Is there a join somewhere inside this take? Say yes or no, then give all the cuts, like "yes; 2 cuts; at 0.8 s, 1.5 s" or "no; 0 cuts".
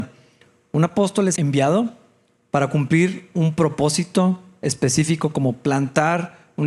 yes; 1 cut; at 1.4 s